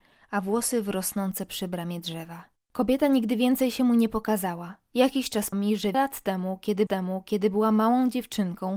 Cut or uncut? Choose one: cut